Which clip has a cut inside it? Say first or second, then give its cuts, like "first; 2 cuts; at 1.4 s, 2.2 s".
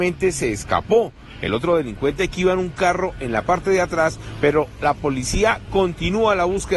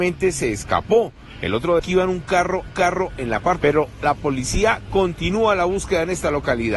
second; 3 cuts; at 1.8 s, 2.7 s, 3.6 s